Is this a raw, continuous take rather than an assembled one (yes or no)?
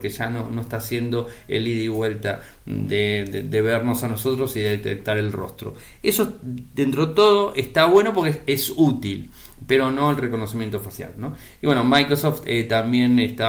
yes